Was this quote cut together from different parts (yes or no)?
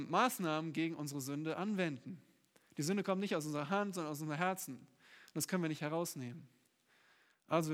no